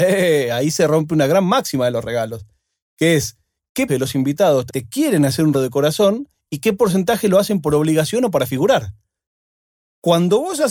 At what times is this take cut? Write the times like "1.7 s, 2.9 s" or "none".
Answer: 3.9 s, 4.7 s, 5.5 s